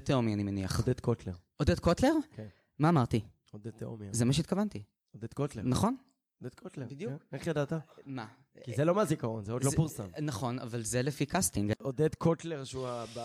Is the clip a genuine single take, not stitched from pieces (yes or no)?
yes